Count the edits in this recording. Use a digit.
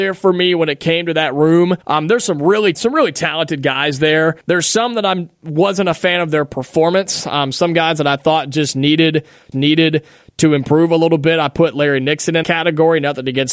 5